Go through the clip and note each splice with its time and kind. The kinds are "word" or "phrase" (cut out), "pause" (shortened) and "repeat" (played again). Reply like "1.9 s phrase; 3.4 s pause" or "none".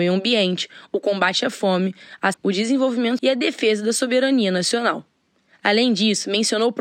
2.3 s word; 3.2 s word